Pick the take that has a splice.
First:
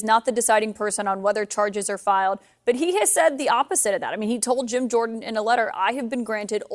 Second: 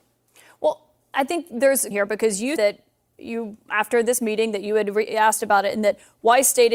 second; 2 cuts; at 1.9 s, 2.6 s

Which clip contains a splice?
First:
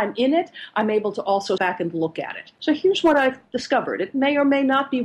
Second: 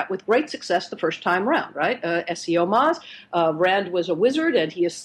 first; 2 cuts; at 1.6 s, 2.5 s

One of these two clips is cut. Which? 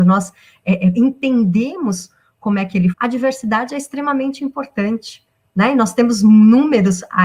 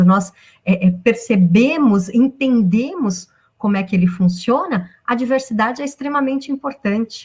first; 2 cuts; at 0.9 s, 2.9 s

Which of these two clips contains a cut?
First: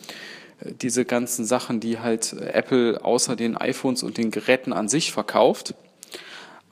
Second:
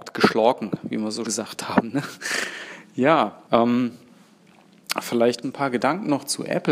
second; 3 cuts; at 1.3 s, 3.5 s, 5.4 s

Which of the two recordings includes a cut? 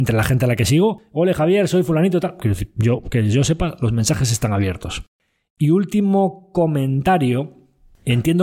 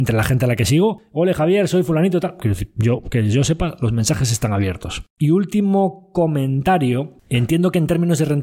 second; 2 cuts; at 5.1 s, 7.2 s

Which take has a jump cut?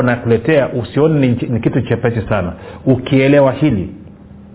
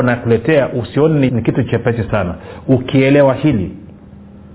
second; 1 cut; at 1.3 s

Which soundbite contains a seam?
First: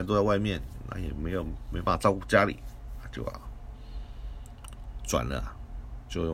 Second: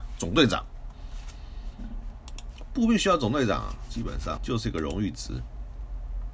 second; 1 cut; at 4.4 s

